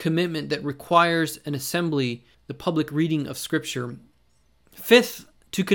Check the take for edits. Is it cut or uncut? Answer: cut